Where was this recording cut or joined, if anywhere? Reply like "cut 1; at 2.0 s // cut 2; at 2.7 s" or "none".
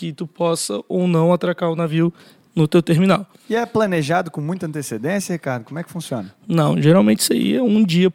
none